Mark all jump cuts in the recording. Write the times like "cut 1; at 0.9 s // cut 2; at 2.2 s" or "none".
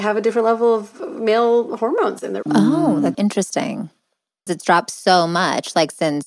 cut 1; at 2.4 s // cut 2; at 3.1 s // cut 3; at 4.5 s

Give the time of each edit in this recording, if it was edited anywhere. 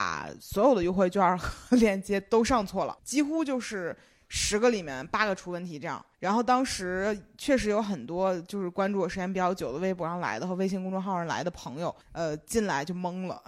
cut 1; at 3.0 s // cut 2; at 6.1 s // cut 3; at 12.0 s

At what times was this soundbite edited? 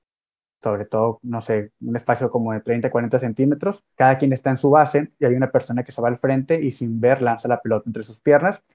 cut 1; at 3.9 s

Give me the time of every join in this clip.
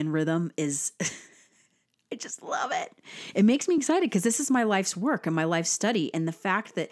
none

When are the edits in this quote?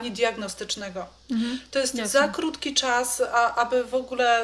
none

